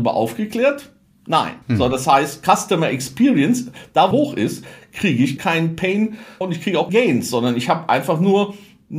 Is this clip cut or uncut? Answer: cut